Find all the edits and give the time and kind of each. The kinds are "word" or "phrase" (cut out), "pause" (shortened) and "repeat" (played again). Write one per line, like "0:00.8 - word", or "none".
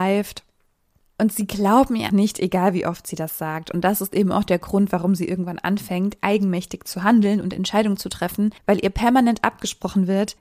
0:02.1 - word